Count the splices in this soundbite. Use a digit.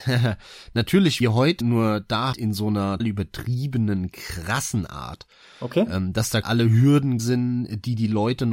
6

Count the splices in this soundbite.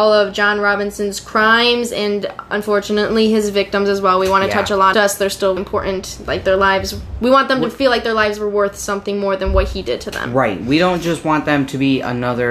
2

